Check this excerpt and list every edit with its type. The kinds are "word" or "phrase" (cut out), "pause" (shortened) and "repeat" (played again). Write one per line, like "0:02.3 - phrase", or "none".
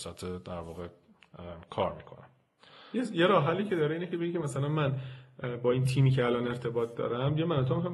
none